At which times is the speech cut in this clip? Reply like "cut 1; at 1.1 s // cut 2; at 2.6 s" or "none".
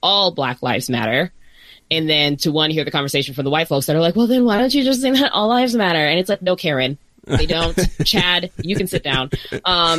none